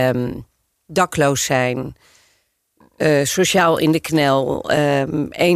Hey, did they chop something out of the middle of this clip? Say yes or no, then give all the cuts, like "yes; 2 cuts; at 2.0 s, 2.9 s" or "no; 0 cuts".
no; 0 cuts